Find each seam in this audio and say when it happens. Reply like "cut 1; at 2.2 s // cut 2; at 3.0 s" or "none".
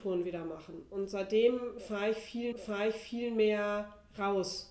cut 1; at 2.5 s